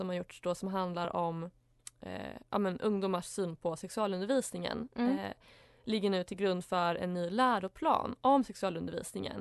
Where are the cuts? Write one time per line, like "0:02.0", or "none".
none